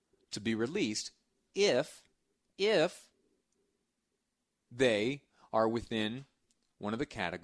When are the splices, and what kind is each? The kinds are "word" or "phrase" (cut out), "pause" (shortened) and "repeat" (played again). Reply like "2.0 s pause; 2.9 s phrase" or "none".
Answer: none